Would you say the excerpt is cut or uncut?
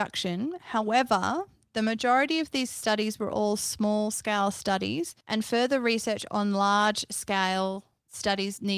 cut